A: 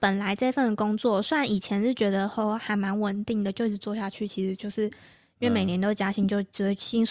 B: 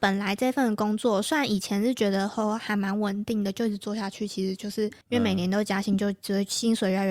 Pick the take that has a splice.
B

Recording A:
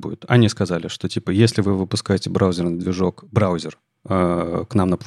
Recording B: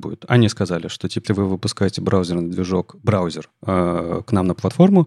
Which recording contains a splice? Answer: B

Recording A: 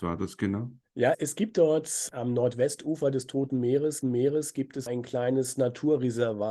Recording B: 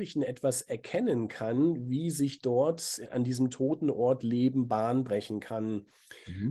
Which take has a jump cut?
A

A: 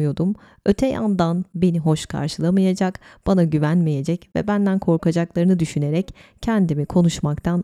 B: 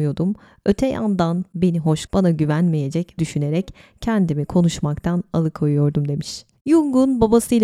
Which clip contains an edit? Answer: B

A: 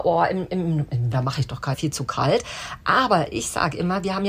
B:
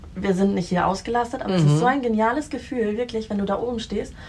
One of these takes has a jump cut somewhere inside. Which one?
A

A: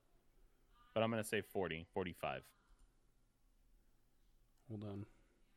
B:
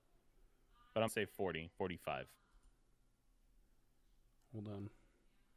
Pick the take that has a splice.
B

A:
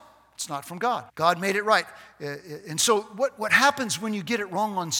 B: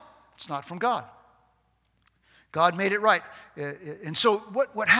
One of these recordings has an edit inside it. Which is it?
A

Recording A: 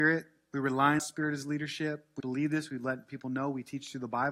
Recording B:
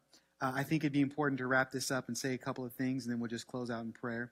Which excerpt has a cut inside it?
A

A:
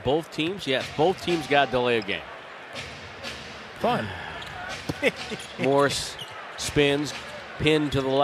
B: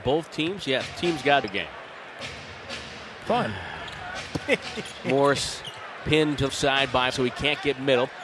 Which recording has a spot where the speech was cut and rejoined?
B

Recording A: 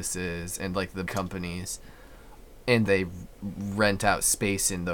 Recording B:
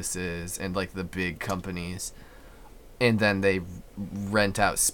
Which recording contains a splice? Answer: A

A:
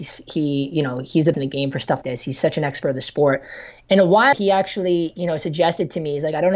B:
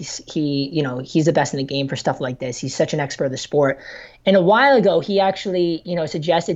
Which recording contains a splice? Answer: A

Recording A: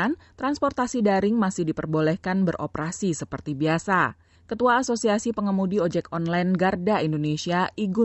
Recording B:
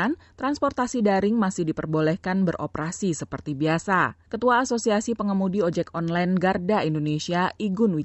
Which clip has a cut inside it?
B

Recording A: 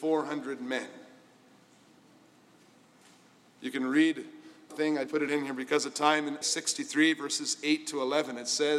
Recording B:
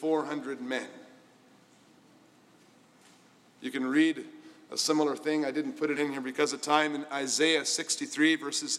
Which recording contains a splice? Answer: A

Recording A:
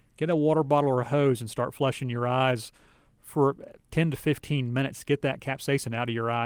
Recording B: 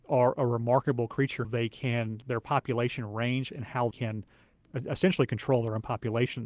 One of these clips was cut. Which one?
B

